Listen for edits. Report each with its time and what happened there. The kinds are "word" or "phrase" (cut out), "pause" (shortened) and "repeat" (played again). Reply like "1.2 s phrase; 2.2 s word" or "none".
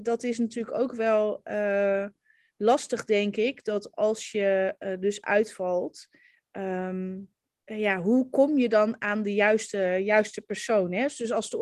7.5 s pause